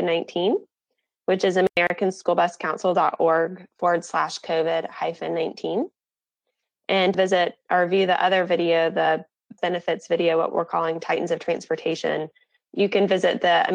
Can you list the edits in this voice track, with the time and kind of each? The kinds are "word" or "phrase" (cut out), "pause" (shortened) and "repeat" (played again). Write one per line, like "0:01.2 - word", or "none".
0:07.1 - word
0:09.6 - word